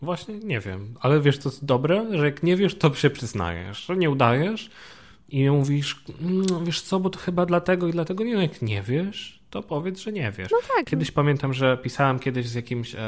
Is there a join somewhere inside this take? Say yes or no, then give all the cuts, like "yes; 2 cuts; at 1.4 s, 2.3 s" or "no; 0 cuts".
no; 0 cuts